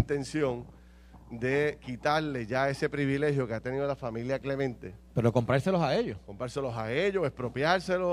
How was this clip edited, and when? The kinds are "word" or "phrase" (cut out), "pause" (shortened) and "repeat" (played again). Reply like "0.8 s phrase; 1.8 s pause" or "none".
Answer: none